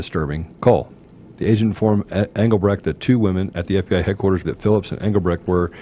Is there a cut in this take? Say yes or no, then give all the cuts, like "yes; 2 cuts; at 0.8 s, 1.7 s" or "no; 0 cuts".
yes; 1 cut; at 4.4 s